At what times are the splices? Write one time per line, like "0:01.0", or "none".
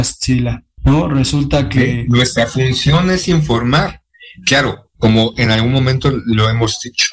none